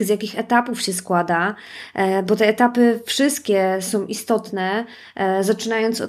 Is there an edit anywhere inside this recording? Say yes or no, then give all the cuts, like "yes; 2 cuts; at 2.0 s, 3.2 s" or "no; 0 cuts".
no; 0 cuts